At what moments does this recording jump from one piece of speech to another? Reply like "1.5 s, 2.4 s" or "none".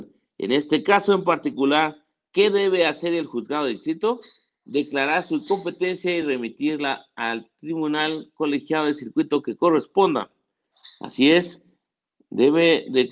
none